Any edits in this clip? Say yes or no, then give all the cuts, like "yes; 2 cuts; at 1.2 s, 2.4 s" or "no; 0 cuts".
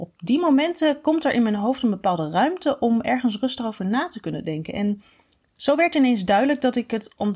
no; 0 cuts